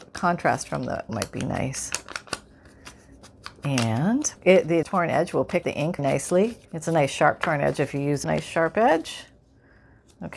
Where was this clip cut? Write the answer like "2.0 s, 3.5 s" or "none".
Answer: 1.1 s, 4.4 s, 4.8 s, 5.6 s, 6.0 s, 6.6 s, 8.2 s

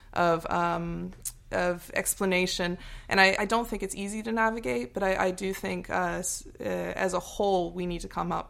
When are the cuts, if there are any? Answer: 3.4 s

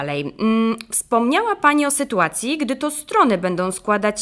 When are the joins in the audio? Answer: none

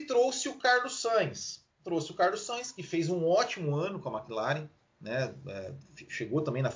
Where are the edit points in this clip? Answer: 1.7 s

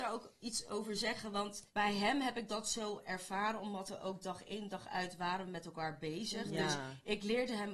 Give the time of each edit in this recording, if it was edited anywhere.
1.7 s

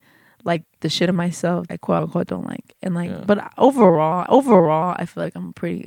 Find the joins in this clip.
1.7 s, 4.3 s

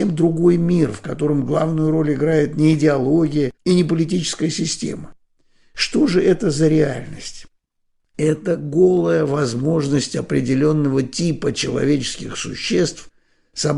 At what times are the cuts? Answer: 3.6 s

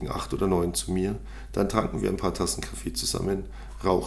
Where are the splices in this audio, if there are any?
none

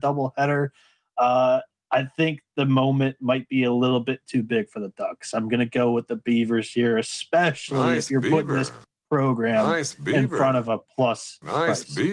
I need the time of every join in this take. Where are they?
none

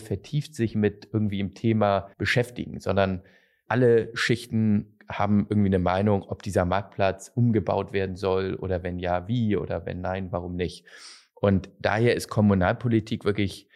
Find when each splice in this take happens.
2.1 s, 3.7 s

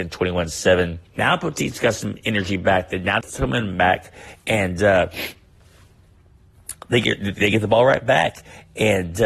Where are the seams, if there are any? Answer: 1.1 s, 3.2 s

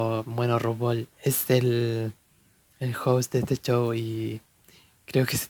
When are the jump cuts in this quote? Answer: 1.1 s

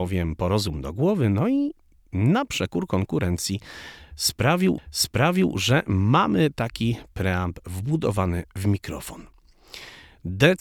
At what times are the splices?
4.8 s

